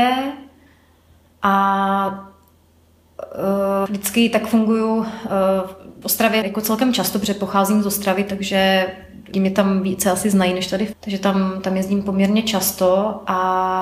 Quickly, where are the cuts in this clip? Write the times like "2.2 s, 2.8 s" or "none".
3.9 s, 6.0 s, 6.4 s, 9.3 s, 10.9 s